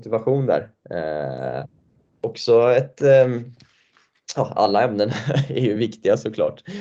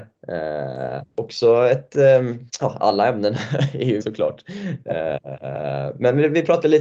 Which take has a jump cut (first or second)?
second